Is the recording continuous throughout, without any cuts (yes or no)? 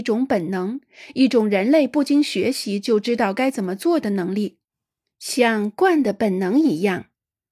yes